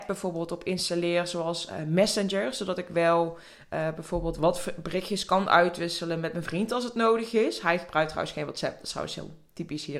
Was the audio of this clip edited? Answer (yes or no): no